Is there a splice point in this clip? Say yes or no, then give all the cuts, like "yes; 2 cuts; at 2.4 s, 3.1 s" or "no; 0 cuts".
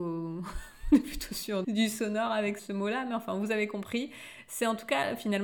yes; 2 cuts; at 1.6 s, 2.6 s